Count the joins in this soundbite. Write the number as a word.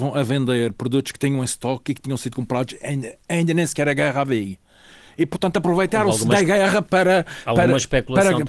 zero